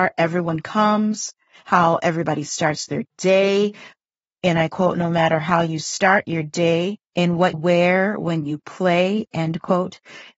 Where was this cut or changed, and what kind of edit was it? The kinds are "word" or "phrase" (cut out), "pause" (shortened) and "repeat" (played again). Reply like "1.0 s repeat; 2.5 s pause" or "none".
7.5 s word